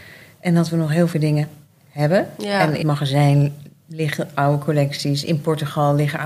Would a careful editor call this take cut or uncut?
cut